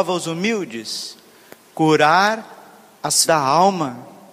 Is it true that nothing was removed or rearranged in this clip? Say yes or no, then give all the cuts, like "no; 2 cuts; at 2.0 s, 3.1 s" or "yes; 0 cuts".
no; 1 cut; at 3.2 s